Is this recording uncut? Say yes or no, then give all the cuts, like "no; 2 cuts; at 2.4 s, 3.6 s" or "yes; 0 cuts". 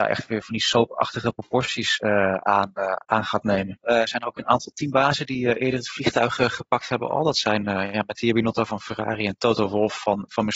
yes; 0 cuts